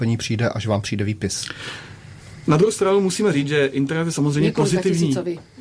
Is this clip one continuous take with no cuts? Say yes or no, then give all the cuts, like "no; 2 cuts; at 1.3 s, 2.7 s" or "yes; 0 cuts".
yes; 0 cuts